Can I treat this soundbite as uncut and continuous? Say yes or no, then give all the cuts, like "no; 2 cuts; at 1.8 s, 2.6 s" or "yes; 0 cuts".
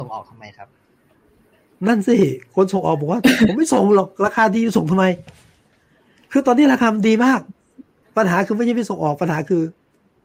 no; 1 cut; at 8.0 s